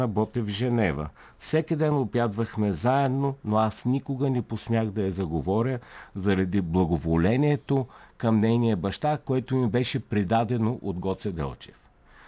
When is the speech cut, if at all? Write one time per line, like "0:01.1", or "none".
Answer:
none